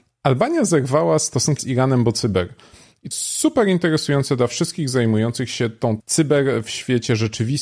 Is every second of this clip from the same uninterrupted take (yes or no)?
no